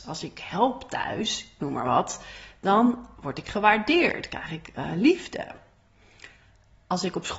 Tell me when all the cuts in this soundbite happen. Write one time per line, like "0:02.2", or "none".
none